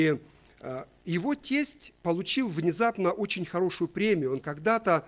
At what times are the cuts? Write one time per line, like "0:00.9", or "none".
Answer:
0:02.0